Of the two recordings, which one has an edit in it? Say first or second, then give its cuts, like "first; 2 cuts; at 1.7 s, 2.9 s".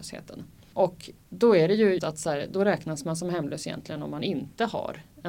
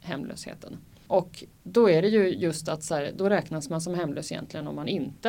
first; 1 cut; at 2.0 s